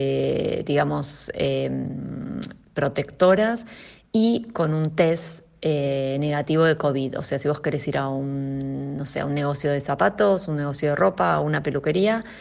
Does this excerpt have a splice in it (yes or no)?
no